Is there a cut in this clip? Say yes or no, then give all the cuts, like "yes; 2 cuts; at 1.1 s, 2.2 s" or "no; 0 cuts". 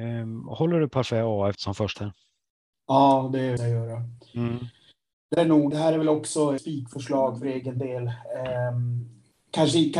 yes; 6 cuts; at 1.5 s, 1.9 s, 3.6 s, 5.4 s, 5.7 s, 6.6 s